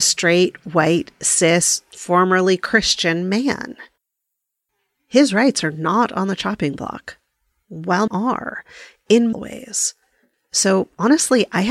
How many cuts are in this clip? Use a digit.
2